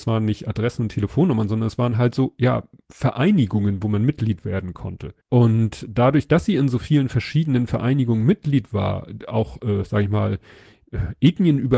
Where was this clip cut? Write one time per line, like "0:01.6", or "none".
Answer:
0:05.2